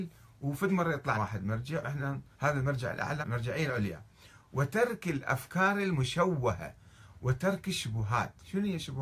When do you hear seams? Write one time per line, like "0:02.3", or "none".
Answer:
0:01.1
0:01.8
0:02.3
0:03.2